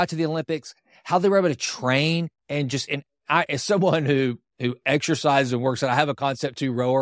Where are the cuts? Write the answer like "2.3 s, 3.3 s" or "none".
2.4 s